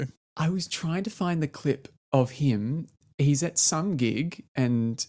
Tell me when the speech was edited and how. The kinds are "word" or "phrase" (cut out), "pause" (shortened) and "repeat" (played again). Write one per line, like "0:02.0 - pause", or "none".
none